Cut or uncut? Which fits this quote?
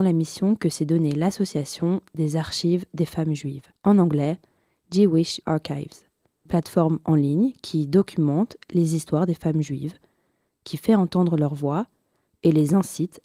cut